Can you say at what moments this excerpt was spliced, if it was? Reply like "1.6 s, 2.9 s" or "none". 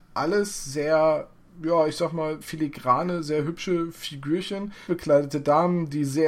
1.4 s, 2.4 s, 4.9 s